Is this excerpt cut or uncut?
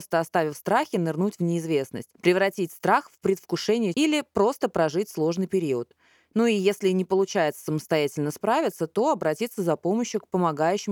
cut